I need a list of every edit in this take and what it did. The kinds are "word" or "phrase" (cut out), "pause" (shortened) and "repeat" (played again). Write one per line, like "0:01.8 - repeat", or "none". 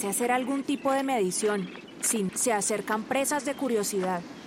0:02.3 - word